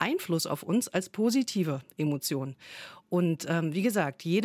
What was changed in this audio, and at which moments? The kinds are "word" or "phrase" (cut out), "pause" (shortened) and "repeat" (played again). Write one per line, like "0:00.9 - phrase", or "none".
none